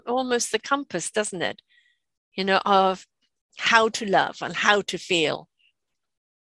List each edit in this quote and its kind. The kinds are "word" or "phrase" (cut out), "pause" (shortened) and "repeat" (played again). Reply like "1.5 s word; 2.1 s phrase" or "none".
none